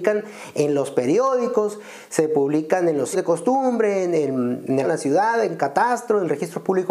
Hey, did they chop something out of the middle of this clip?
yes; 2 cuts; at 3.1 s, 4.8 s

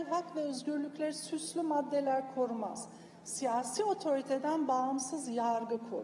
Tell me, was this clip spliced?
no; 0 cuts

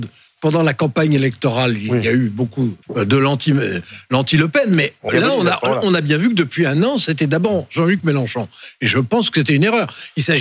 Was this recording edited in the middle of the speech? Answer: yes; 2 cuts; at 2.8 s, 5.1 s

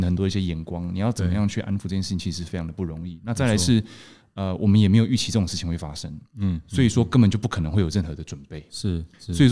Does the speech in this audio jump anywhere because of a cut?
no; 0 cuts

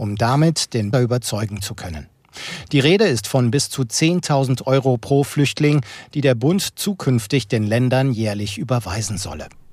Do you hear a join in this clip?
yes; 1 cut; at 0.9 s

